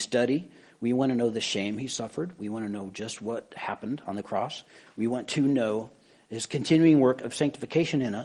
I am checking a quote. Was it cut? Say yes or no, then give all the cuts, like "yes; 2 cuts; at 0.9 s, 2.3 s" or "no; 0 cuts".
no; 0 cuts